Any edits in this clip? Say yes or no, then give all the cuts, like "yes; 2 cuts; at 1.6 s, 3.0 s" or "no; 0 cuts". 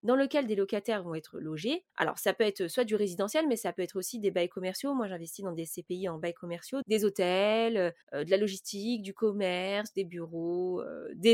yes; 3 cuts; at 1.9 s, 6.8 s, 8.0 s